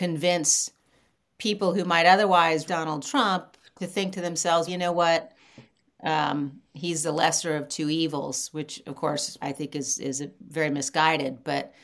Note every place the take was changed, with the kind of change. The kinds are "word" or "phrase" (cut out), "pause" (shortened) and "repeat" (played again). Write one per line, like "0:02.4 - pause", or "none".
0:02.7 - word
0:04.7 - word
0:09.4 - word